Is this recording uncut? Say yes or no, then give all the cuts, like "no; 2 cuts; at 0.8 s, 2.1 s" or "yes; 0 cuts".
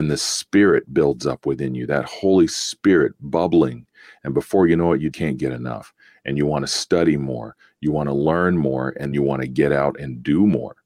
no; 2 cuts; at 5.1 s, 9.1 s